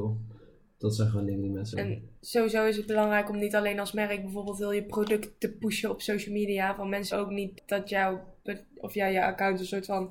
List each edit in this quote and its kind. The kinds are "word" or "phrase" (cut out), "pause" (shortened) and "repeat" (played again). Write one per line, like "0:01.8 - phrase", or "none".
0:01.7 - phrase
0:07.1 - word
0:07.6 - word